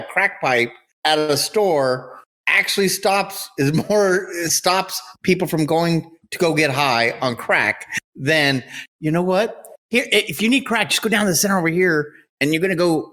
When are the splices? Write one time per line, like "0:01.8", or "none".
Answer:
none